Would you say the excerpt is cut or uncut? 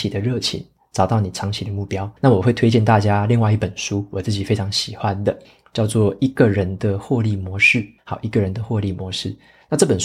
cut